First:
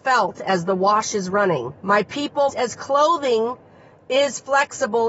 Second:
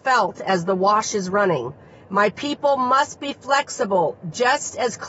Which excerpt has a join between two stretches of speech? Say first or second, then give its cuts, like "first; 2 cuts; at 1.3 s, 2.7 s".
first; 2 cuts; at 1.8 s, 2.5 s